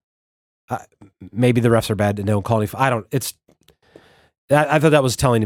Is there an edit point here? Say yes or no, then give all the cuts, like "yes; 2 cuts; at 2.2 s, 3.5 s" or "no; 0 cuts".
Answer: no; 0 cuts